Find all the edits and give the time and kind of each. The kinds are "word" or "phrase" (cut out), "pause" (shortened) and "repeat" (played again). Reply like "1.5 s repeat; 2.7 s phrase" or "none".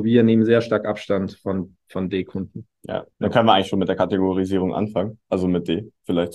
3.1 s pause